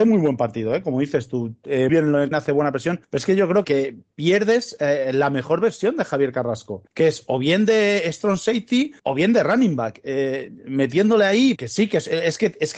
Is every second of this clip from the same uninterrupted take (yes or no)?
no